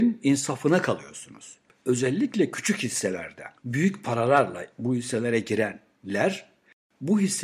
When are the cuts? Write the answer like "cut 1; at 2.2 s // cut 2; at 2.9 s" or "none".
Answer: cut 1; at 3.6 s